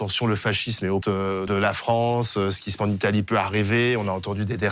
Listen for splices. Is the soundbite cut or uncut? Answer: cut